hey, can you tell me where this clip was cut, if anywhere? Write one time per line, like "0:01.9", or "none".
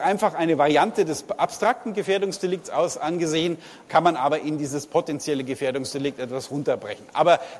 0:03.9